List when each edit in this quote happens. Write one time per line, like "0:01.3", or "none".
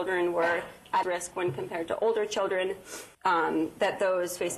0:01.0
0:03.1